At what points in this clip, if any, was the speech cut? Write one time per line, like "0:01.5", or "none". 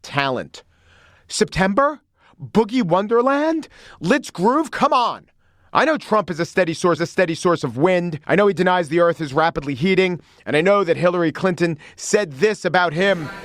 0:07.0
0:08.2

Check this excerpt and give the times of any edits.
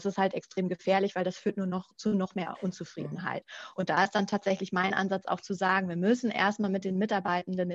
none

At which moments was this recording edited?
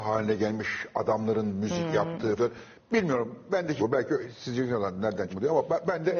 0:02.4
0:03.8
0:05.3

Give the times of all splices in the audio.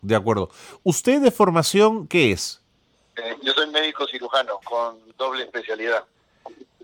0:02.9
0:04.6

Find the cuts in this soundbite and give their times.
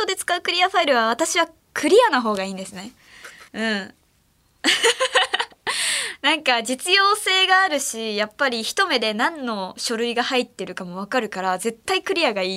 0:03.5

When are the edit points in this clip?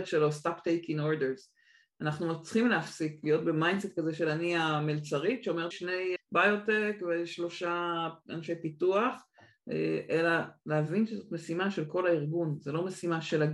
0:05.7
0:06.2

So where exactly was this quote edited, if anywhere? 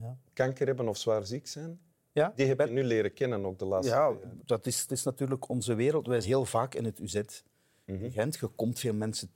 0:04.4
0:04.9
0:05.5
0:06.2

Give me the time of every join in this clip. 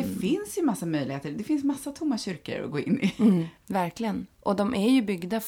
none

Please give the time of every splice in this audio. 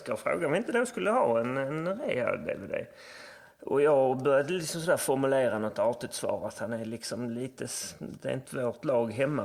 0:08.5

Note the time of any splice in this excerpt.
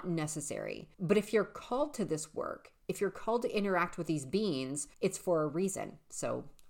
0:00.9
0:04.9

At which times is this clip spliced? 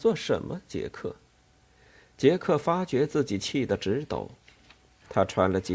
none

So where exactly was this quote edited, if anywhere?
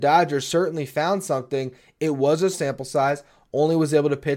0:02.5

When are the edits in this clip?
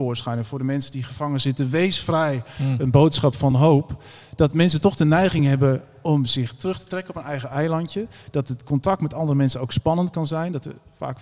none

